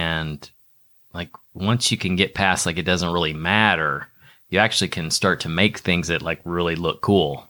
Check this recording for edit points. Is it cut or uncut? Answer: uncut